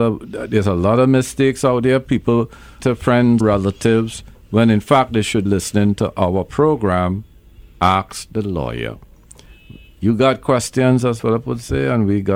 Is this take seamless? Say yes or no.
no